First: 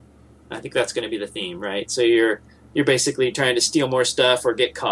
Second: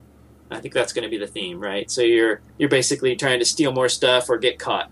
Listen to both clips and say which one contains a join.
second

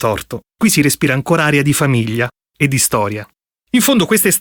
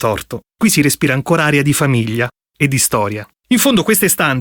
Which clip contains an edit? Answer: second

